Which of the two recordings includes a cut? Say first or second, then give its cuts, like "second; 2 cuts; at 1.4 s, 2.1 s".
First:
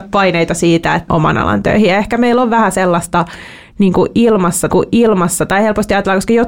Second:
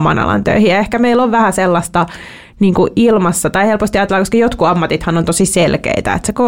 first; 2 cuts; at 1.1 s, 4.7 s